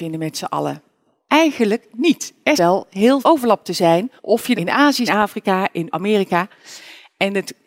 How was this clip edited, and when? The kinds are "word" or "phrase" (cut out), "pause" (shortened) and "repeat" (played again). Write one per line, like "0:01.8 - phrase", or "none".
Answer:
0:02.6 - word
0:03.2 - word
0:04.2 - pause
0:04.5 - word
0:05.1 - phrase
0:05.9 - word